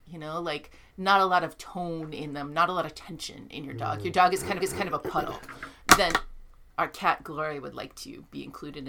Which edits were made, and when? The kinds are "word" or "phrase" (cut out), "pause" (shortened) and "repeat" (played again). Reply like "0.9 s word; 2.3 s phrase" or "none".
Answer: 4.6 s repeat; 6.7 s word